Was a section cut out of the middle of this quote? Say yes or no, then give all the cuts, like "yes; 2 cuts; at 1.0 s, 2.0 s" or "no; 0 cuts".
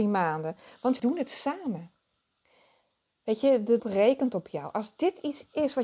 yes; 2 cuts; at 1.0 s, 3.8 s